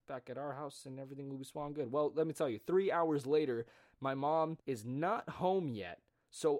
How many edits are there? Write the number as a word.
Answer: one